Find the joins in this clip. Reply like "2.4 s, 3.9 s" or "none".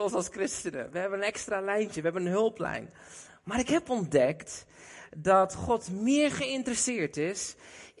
none